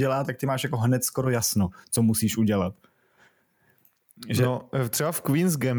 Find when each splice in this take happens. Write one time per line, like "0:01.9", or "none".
none